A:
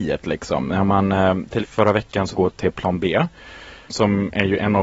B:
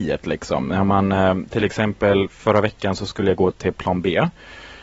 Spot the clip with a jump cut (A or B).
A